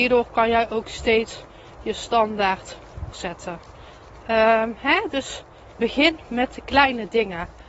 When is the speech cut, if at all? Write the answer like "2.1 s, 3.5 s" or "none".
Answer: 3.1 s, 5.8 s